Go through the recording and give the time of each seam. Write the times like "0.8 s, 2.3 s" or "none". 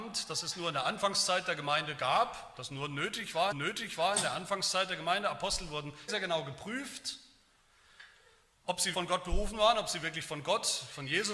3.5 s, 6.1 s, 8.9 s